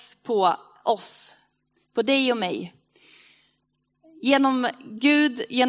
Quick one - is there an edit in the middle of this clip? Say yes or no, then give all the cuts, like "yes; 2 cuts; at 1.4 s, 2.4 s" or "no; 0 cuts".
no; 0 cuts